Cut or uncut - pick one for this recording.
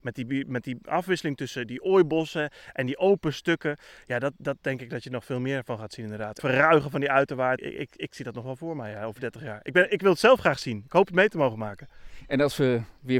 cut